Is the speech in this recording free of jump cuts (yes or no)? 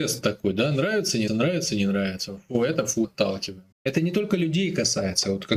no